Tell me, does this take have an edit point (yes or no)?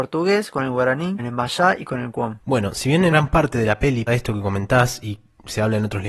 yes